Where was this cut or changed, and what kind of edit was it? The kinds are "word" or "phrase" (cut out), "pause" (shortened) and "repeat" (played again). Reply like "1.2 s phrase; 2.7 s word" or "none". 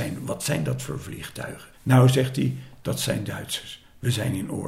1.7 s pause